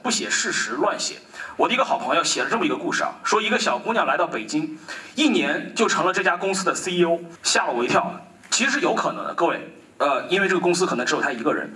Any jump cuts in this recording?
no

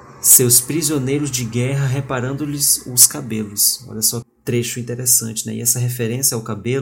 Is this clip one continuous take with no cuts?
no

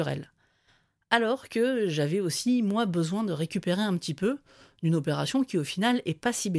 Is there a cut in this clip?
no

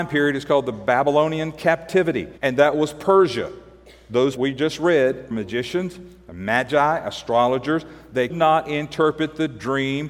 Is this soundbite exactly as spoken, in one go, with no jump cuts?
no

